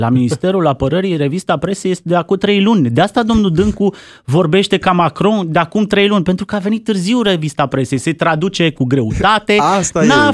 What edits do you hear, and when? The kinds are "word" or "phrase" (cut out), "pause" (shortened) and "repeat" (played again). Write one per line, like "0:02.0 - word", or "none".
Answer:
none